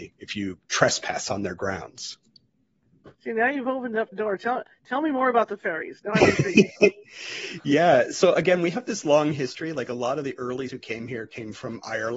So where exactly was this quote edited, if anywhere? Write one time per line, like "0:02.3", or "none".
0:03.1
0:04.1
0:10.7